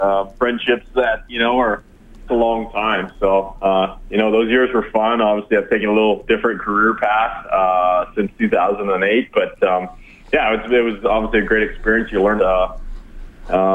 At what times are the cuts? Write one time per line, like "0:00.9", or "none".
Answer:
0:01.2
0:02.3
0:12.4